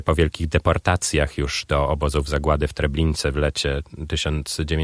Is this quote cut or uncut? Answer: uncut